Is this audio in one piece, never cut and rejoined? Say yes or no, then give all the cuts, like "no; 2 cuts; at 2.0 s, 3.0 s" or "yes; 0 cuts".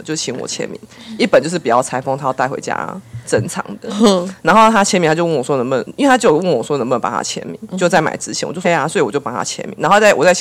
no; 2 cuts; at 7.7 s, 8.6 s